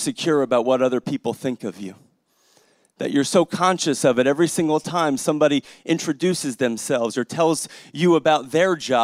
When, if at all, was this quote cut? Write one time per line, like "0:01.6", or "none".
none

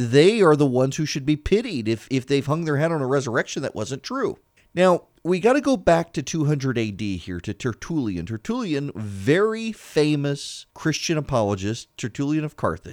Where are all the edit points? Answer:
0:04.6
0:10.7

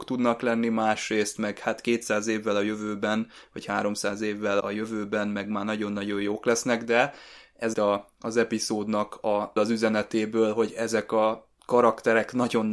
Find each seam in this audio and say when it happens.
0:04.6
0:07.7
0:09.6
0:11.5

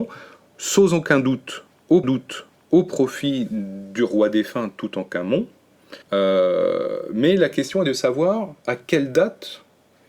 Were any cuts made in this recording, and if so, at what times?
0:02.0
0:06.0
0:08.6

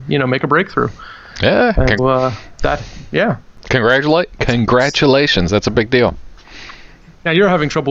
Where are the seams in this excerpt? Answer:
0:02.0

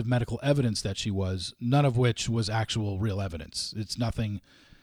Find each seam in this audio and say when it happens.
none

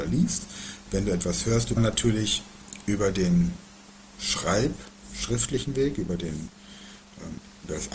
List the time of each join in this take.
0:01.8

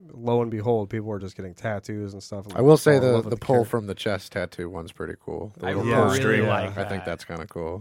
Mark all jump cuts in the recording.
none

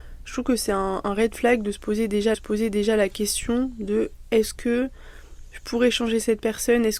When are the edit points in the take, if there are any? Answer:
0:02.3

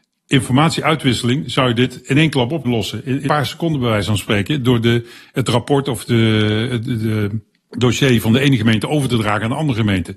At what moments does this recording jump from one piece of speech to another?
0:02.6
0:03.3

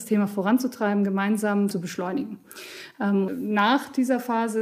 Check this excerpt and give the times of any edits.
0:01.7
0:03.3

